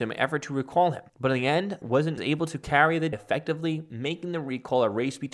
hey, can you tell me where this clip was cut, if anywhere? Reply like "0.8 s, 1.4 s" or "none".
1.1 s, 1.8 s, 2.2 s, 3.1 s